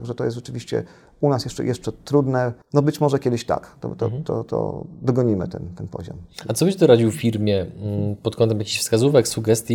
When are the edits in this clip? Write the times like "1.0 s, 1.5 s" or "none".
2.6 s

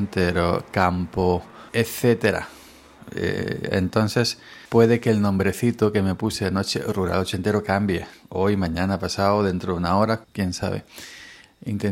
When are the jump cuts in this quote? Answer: 1.7 s, 4.6 s, 10.2 s

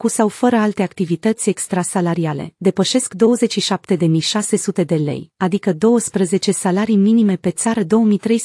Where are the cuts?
none

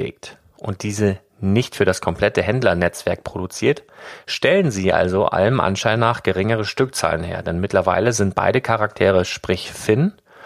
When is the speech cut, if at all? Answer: none

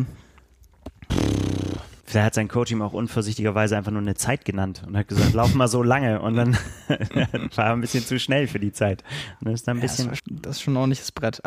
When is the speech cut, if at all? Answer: 2.0 s, 10.2 s

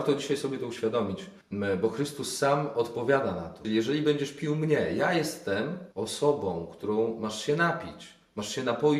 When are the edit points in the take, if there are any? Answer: 1.4 s, 5.9 s

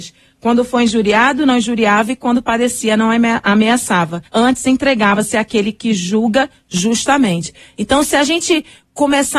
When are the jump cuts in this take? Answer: 4.3 s

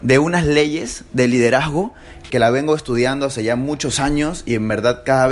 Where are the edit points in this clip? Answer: 2.3 s

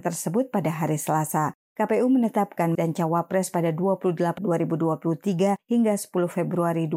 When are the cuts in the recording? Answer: 2.7 s, 4.4 s

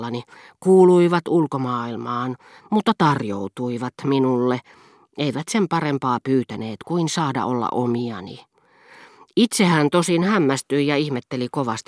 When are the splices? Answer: none

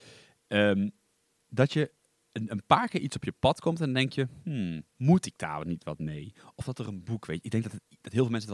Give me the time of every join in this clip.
4.9 s

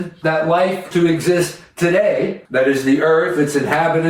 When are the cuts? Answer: 0.9 s, 2.4 s

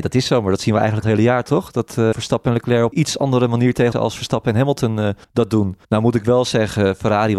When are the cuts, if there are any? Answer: 1.0 s, 2.1 s, 2.9 s, 3.9 s, 5.2 s, 5.8 s

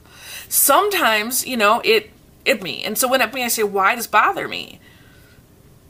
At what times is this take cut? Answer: 1.8 s, 2.6 s, 3.3 s, 4.0 s

